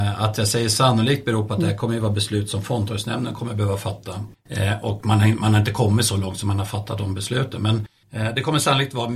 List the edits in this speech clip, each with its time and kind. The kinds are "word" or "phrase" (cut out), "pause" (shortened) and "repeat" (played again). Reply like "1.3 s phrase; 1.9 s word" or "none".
none